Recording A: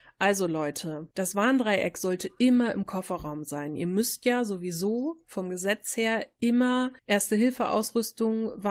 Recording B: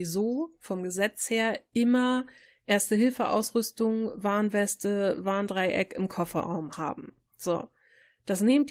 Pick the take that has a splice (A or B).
A